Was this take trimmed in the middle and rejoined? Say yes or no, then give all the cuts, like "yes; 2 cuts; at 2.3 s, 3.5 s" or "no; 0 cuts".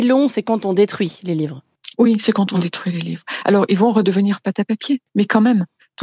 no; 0 cuts